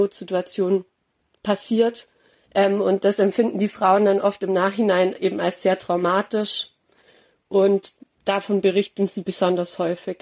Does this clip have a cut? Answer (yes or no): no